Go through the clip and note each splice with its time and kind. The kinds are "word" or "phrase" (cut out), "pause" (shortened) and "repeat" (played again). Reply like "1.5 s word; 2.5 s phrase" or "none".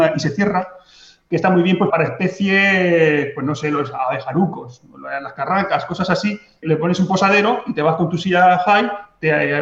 1.9 s word; 6.6 s word